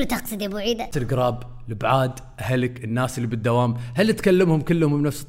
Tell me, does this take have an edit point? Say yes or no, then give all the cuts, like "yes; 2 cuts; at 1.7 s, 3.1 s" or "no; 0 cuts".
yes; 1 cut; at 0.9 s